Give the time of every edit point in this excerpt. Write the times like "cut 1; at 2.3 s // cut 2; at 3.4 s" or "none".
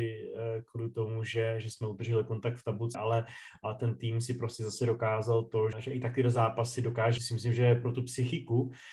cut 1; at 2.9 s // cut 2; at 5.7 s // cut 3; at 7.2 s